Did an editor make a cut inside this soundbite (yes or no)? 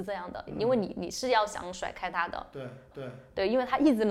yes